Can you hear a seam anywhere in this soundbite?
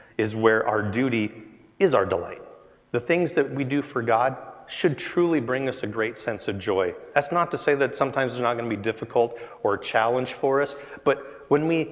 no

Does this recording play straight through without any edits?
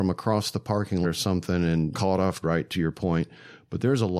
no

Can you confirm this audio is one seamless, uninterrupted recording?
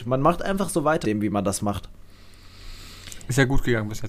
no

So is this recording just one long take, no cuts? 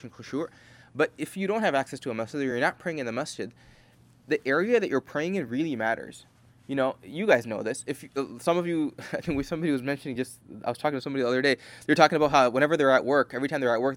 yes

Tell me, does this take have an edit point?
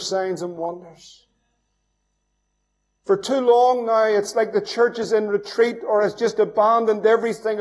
no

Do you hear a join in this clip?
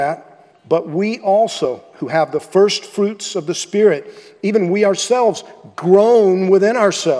no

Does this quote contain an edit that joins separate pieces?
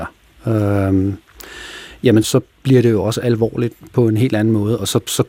yes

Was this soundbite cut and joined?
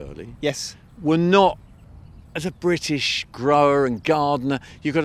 no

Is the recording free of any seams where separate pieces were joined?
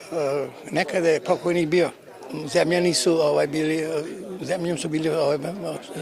yes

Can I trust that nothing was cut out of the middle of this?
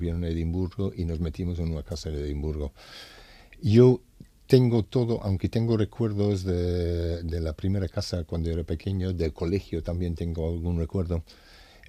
yes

